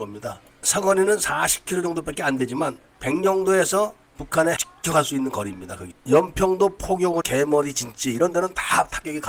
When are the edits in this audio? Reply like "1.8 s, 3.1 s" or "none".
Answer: 4.6 s, 7.2 s